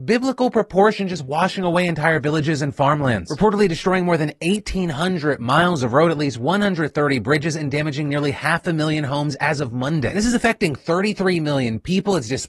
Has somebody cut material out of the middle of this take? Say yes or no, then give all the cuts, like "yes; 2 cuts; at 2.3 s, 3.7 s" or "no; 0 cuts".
no; 0 cuts